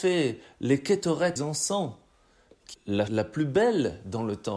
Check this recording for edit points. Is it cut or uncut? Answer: cut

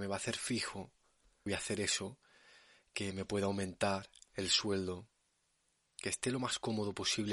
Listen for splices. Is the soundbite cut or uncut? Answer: cut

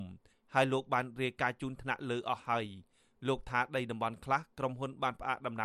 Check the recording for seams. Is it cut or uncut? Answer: uncut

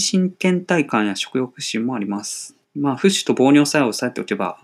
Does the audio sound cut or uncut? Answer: cut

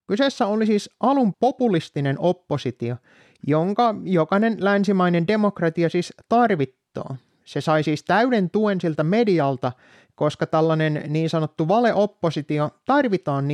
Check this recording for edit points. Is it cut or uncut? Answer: cut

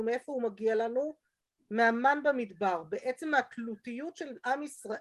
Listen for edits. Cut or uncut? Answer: uncut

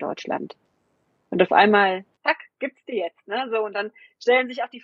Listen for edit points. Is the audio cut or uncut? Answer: cut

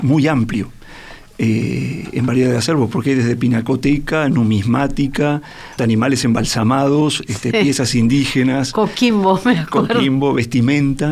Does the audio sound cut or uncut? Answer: cut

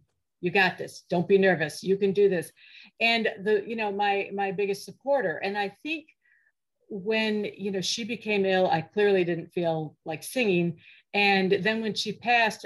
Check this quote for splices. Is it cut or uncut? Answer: uncut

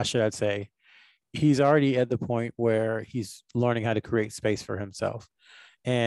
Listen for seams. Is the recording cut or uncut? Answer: uncut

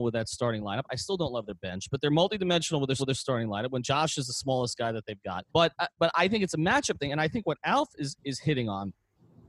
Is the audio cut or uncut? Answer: cut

